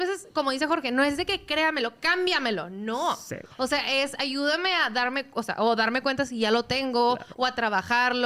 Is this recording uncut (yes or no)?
yes